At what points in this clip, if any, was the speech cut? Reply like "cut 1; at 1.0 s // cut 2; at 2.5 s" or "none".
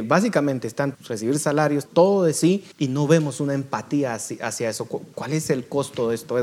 cut 1; at 0.9 s // cut 2; at 1.9 s // cut 3; at 2.7 s